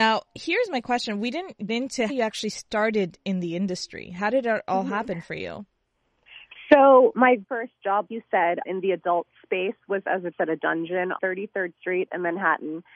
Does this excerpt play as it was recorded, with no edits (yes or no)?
no